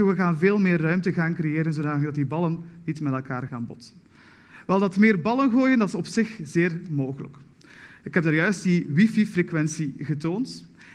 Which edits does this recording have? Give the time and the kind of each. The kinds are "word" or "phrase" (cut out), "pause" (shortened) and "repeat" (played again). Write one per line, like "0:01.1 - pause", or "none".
0:03.5 - word